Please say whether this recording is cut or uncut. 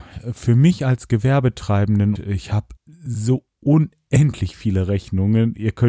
cut